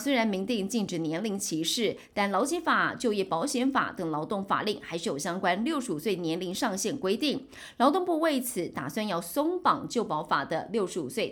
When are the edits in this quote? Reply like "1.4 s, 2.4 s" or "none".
none